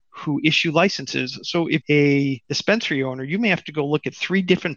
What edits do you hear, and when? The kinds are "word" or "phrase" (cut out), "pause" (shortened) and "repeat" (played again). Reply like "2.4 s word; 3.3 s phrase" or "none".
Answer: 1.8 s word; 2.4 s pause